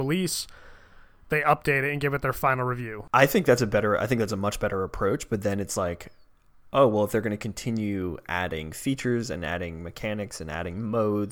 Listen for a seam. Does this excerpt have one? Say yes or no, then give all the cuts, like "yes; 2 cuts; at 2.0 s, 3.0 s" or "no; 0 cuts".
no; 0 cuts